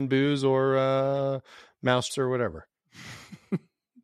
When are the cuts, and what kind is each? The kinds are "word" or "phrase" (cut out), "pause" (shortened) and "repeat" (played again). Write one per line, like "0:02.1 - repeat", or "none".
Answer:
0:02.1 - word